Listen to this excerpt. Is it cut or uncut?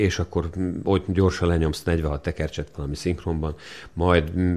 uncut